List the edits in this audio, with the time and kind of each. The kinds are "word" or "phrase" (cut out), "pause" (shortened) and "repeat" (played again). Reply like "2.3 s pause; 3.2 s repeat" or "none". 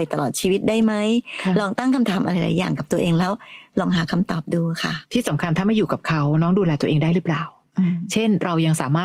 5.0 s pause